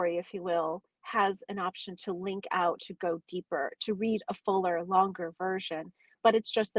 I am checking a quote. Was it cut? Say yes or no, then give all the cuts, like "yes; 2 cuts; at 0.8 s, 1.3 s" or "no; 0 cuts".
no; 0 cuts